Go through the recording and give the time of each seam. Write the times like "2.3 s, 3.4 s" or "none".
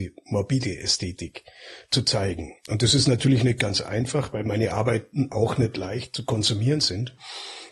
none